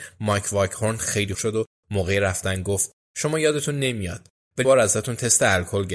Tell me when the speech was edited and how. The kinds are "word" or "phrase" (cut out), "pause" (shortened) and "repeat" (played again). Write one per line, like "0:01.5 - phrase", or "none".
0:01.3 - word
0:04.6 - word